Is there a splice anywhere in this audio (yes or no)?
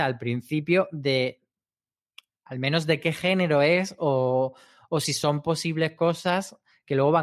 no